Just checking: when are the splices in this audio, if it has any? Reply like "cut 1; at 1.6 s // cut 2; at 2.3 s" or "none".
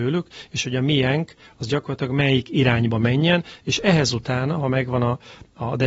none